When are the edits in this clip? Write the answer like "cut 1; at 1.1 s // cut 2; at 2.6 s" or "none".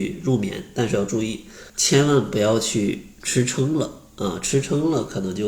cut 1; at 1.7 s